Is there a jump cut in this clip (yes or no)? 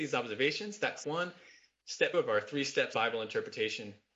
yes